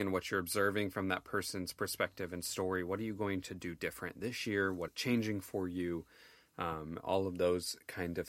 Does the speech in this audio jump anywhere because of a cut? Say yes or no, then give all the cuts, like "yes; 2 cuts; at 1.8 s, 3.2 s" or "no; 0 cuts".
yes; 1 cut; at 4.9 s